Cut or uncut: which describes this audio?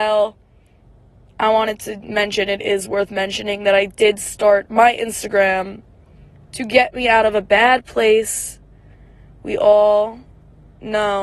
uncut